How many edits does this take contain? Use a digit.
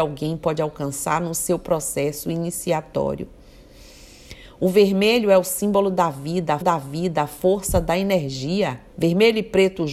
2